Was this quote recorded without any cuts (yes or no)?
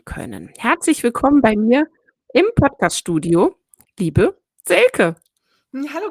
yes